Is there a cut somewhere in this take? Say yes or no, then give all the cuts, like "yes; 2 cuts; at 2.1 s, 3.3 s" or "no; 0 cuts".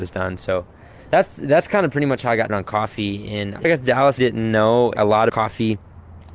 yes; 5 cuts; at 2.5 s, 3.6 s, 4.2 s, 5.0 s, 5.3 s